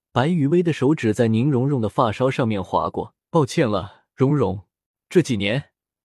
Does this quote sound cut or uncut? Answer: cut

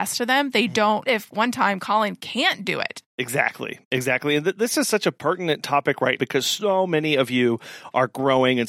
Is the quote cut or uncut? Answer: cut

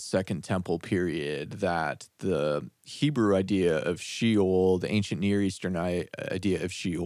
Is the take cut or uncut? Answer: uncut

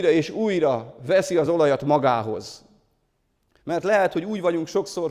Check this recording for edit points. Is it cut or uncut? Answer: uncut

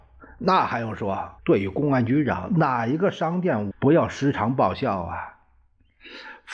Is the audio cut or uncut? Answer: cut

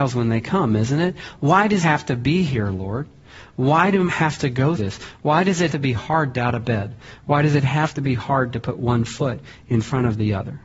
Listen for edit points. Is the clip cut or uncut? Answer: cut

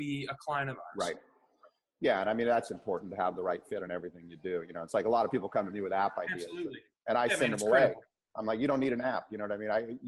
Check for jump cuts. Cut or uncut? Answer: uncut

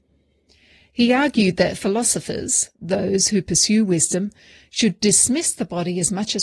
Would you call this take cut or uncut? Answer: uncut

